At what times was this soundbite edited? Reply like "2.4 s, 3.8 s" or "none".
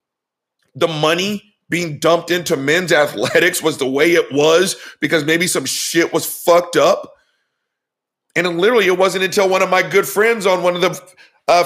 none